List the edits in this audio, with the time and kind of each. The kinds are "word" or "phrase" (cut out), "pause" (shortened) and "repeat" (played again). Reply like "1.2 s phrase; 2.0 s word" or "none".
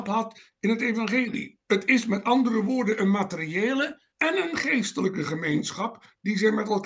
1.6 s pause; 4.1 s pause